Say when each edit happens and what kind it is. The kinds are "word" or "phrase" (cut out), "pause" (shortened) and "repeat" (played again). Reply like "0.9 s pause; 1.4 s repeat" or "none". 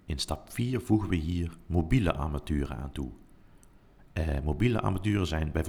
none